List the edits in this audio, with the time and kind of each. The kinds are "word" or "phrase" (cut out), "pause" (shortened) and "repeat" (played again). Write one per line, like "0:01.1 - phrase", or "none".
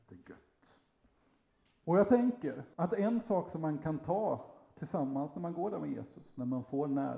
0:02.7 - pause